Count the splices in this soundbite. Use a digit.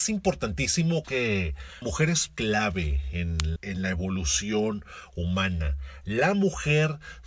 4